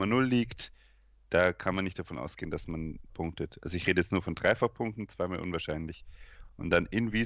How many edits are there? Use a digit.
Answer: 1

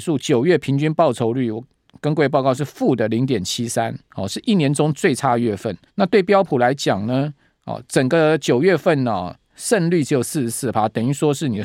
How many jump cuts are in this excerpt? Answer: 1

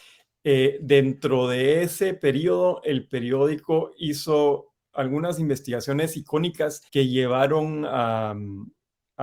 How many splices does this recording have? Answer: 1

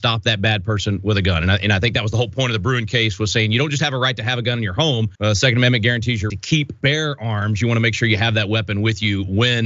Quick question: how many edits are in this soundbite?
3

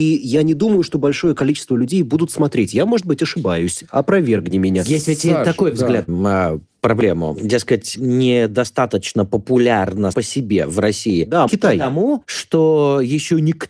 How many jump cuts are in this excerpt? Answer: 4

